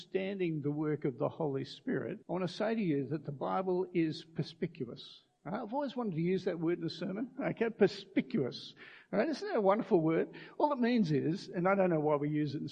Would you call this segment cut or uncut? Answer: cut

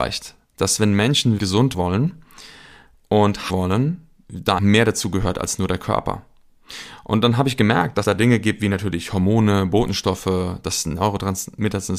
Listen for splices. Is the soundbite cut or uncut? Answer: cut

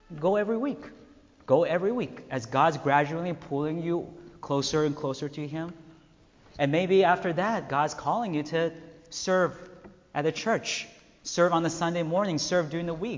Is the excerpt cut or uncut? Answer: uncut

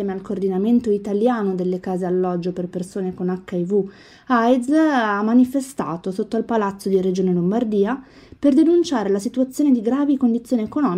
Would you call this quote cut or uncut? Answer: uncut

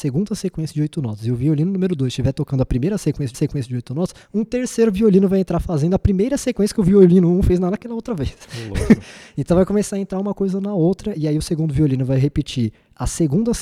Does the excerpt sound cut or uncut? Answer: cut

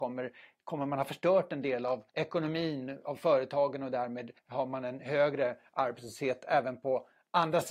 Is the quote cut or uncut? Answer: cut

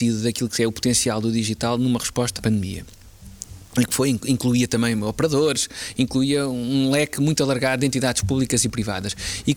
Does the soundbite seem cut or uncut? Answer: cut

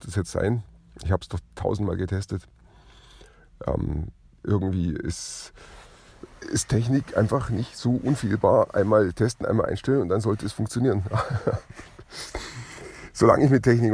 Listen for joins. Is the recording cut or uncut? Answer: uncut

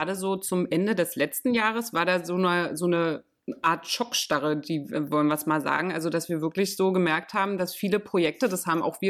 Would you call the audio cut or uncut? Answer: uncut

